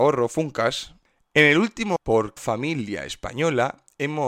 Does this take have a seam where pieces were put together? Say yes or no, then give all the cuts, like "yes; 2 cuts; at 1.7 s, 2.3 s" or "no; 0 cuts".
yes; 2 cuts; at 2.0 s, 2.4 s